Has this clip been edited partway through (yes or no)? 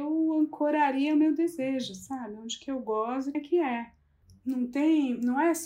yes